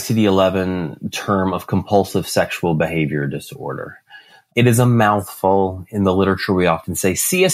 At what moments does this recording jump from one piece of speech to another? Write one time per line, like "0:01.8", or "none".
none